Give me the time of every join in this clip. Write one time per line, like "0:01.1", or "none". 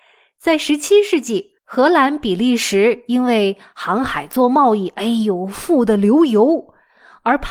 0:01.6